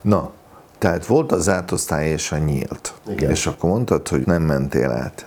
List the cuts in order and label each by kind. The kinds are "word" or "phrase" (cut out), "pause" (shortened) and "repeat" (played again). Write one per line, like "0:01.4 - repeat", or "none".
0:04.2 - word